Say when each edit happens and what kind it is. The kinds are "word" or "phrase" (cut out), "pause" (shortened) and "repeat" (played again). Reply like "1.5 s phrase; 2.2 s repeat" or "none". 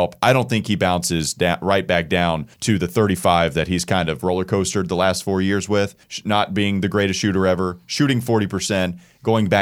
2.5 s pause; 6.0 s pause